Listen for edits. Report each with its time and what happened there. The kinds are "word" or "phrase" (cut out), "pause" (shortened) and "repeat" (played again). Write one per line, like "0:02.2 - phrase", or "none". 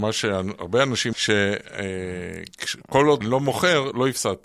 0:01.1 - word
0:03.2 - word